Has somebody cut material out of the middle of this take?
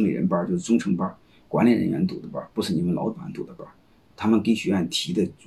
no; 0 cuts

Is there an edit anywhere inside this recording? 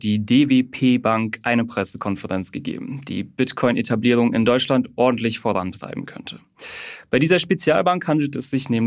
no; 0 cuts

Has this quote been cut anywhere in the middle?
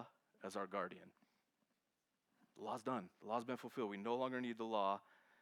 no; 0 cuts

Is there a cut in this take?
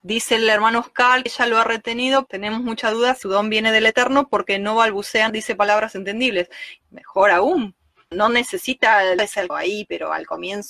yes; 8 cuts; at 1.3 s, 2.3 s, 3.2 s, 5.3 s, 6.8 s, 8.1 s, 9.2 s, 9.5 s

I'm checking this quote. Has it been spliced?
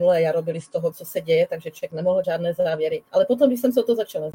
yes; 3 cuts; at 0.9 s, 2.2 s, 3.1 s

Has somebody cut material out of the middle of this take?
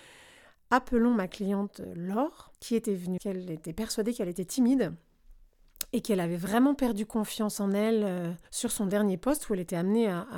yes; 3 cuts; at 2.5 s, 3.2 s, 8.4 s

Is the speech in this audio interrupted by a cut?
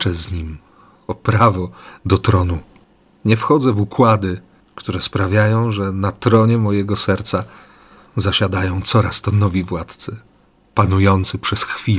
no; 0 cuts

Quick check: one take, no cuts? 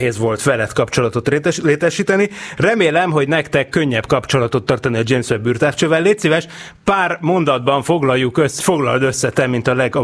no; 1 cut; at 8.6 s

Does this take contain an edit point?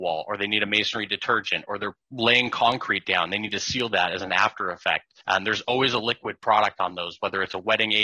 yes; 1 cut; at 5.2 s

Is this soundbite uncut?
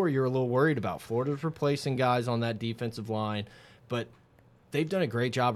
yes; 0 cuts

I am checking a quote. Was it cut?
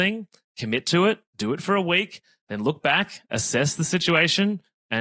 no; 0 cuts

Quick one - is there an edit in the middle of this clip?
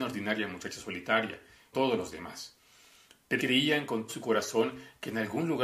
yes; 3 cuts; at 1.7 s, 3.4 s, 4.1 s

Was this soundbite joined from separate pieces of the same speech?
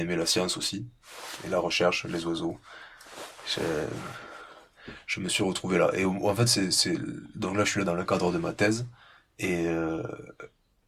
no; 0 cuts

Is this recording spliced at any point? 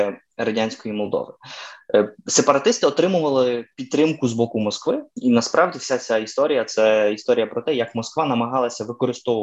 yes; 1 cut; at 5.1 s

